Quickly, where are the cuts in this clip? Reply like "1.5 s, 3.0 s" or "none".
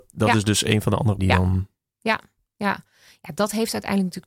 1.2 s